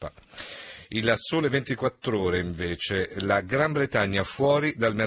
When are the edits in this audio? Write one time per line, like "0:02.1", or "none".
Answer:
none